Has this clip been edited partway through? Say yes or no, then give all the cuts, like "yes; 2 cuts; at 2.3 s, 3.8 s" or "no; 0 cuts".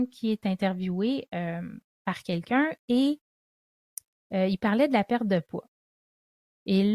no; 0 cuts